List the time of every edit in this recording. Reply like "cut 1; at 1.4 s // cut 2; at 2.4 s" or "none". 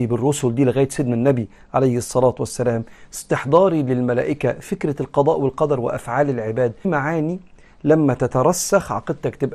cut 1; at 6.8 s